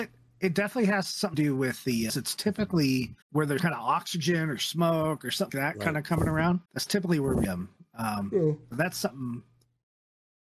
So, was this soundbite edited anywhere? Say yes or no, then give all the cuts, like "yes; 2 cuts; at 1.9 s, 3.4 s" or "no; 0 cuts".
yes; 7 cuts; at 1.3 s, 2.1 s, 3.2 s, 3.6 s, 5.5 s, 6.7 s, 7.5 s